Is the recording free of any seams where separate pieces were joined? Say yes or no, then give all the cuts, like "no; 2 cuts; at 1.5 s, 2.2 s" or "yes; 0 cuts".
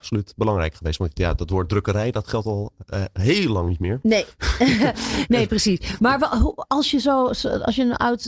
yes; 0 cuts